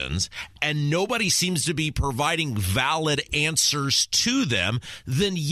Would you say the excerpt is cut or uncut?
uncut